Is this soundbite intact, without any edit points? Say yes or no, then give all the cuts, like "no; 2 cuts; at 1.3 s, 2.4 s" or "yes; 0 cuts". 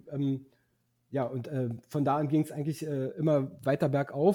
yes; 0 cuts